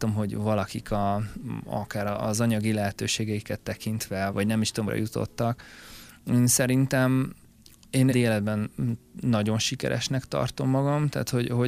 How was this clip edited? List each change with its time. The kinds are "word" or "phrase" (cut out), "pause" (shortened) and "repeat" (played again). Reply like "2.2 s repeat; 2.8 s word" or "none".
4.3 s word; 4.9 s phrase; 8.1 s phrase